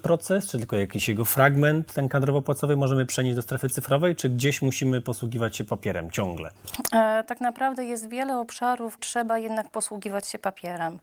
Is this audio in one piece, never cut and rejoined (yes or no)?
no